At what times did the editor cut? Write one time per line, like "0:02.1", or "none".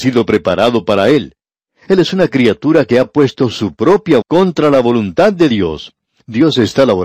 0:04.2